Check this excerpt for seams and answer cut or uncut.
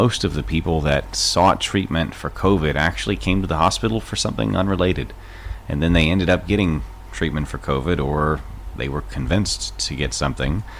uncut